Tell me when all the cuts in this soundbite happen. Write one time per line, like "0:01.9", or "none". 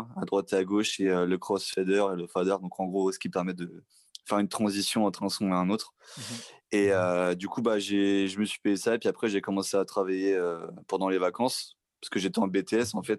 none

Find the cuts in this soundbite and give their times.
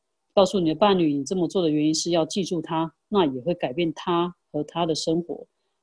0:04.4

